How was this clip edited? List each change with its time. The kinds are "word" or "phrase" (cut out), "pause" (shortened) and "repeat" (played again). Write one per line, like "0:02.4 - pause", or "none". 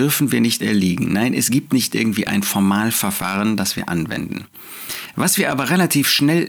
none